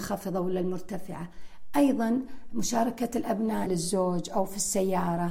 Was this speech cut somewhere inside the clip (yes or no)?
yes